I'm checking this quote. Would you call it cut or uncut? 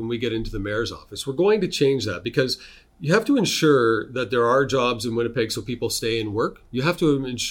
uncut